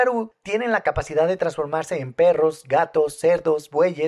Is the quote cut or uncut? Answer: uncut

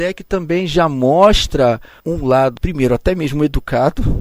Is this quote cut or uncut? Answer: cut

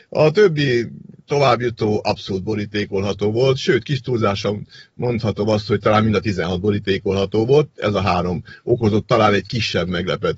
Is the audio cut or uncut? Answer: uncut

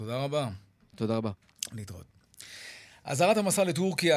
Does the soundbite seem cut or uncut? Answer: uncut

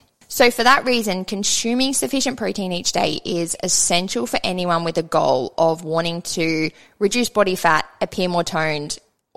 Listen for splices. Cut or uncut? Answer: uncut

